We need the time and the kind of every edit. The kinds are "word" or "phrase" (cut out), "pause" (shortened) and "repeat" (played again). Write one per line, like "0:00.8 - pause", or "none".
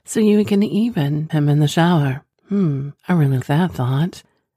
0:01.3 - word
0:03.0 - pause
0:03.4 - word